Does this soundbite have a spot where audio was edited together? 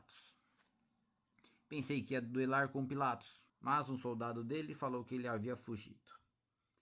yes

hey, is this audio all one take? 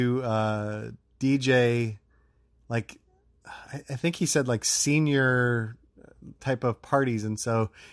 yes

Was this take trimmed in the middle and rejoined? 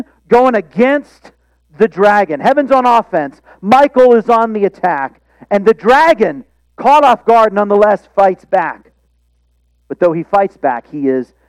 no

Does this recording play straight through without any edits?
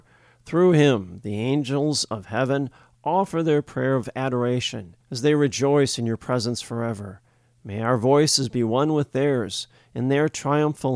no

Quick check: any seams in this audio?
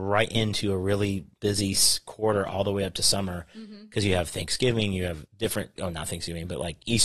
yes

